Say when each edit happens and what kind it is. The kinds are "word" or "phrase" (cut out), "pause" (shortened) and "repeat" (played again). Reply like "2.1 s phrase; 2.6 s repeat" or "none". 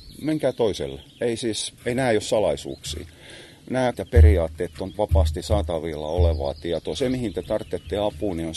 1.1 s pause; 1.8 s pause; 3.9 s phrase; 4.9 s word